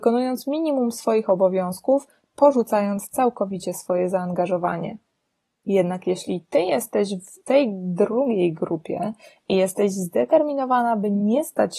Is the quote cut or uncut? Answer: uncut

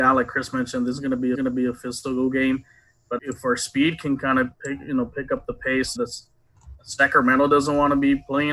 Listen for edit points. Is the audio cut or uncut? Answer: cut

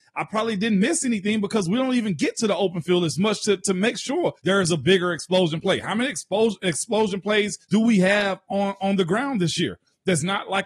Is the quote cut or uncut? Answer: cut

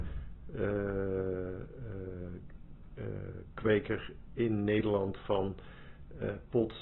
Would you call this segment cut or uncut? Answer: uncut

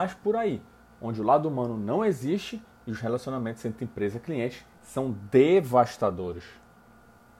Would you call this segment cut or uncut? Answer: uncut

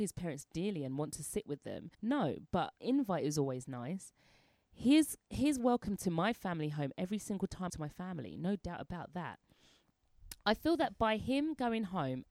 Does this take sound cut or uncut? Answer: cut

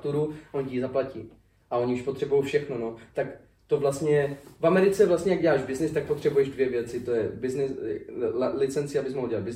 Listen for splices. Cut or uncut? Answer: uncut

